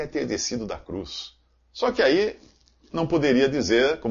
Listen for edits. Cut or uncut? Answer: uncut